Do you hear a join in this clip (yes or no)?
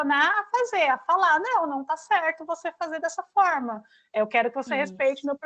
no